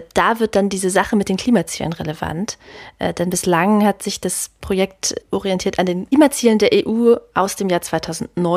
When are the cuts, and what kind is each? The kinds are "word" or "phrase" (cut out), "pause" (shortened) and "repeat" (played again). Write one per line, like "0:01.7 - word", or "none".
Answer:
0:05.2 - word